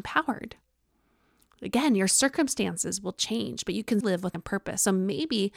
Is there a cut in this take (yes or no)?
yes